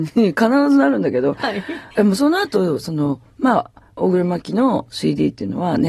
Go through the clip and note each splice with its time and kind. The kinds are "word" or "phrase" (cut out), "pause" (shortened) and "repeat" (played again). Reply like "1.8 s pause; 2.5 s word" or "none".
1.9 s pause